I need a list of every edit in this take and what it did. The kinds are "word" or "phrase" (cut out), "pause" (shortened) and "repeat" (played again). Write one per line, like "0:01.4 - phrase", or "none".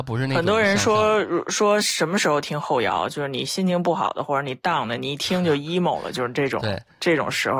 none